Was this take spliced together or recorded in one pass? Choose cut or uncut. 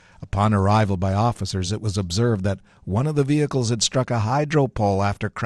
uncut